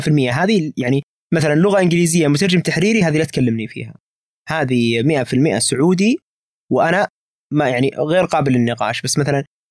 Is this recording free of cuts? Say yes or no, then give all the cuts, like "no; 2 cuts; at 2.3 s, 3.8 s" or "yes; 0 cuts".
yes; 0 cuts